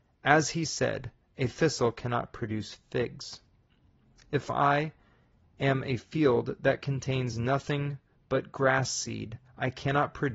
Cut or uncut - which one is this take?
uncut